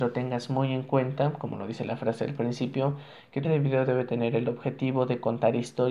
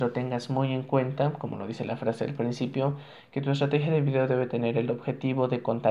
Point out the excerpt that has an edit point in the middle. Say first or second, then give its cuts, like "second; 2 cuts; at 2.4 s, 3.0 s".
first; 1 cut; at 3.4 s